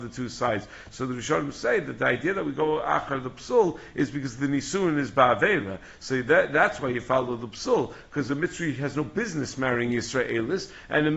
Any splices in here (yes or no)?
no